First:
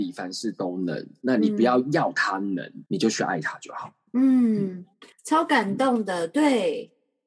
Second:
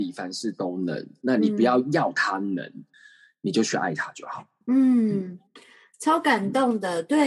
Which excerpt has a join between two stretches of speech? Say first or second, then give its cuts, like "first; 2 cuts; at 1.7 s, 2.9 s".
first; 2 cuts; at 2.9 s, 5.1 s